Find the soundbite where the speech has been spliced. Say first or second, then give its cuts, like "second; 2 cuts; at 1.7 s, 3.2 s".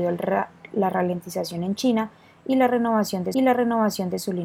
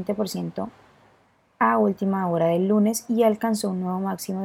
first; 1 cut; at 3.3 s